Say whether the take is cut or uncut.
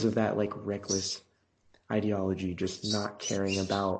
uncut